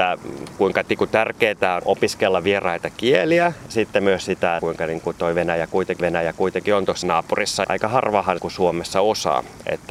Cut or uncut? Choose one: cut